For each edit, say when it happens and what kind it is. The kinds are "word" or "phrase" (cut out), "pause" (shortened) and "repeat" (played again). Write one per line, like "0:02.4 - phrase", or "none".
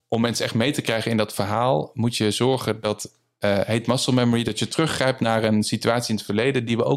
none